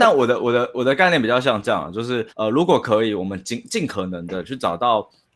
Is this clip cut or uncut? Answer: cut